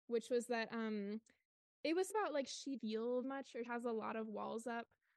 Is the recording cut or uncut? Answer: cut